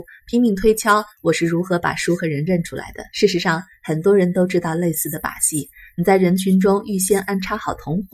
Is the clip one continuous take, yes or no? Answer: no